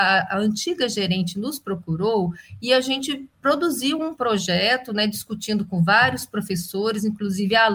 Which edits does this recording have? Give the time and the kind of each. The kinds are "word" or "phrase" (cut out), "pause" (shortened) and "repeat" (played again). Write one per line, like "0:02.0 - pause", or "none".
none